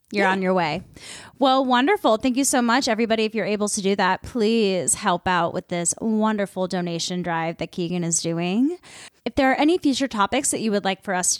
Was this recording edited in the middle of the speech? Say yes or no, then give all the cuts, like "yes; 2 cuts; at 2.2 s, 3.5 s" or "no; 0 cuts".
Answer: yes; 1 cut; at 9.2 s